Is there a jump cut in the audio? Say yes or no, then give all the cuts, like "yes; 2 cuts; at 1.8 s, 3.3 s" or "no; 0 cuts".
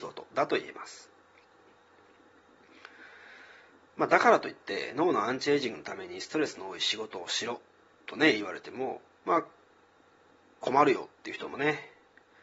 no; 0 cuts